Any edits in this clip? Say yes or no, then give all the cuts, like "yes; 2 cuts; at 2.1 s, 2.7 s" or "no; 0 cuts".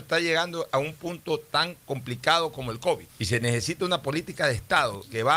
yes; 1 cut; at 3.1 s